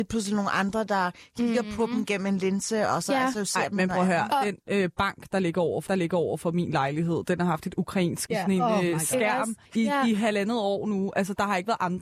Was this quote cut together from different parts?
yes; 3 cuts; at 5.9 s, 8.3 s, 9.6 s

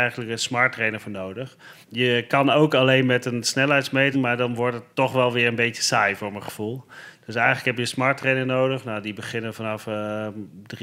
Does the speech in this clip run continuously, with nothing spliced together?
no; 3 cuts; at 1.8 s, 4.1 s, 4.9 s

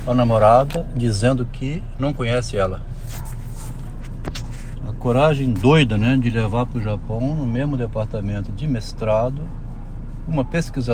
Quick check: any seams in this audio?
no; 0 cuts

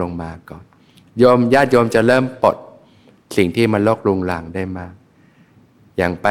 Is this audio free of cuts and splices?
yes; 0 cuts

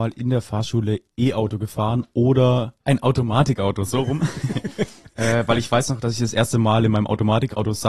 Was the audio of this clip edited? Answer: yes; 1 cut; at 2.8 s

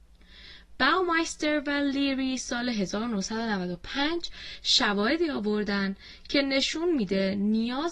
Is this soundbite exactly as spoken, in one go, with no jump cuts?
yes; 0 cuts

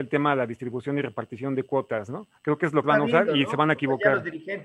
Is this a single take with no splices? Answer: no; 2 cuts; at 2.4 s, 2.8 s

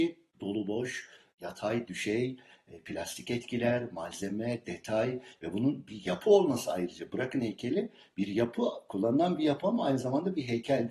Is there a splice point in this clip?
no; 0 cuts

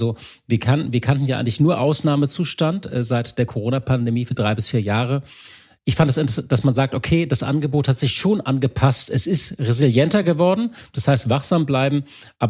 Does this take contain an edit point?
no; 0 cuts

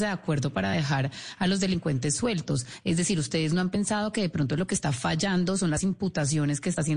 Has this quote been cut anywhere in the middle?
no; 0 cuts

